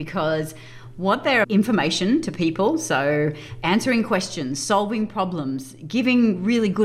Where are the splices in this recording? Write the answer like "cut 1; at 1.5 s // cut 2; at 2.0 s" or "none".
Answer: cut 1; at 1.4 s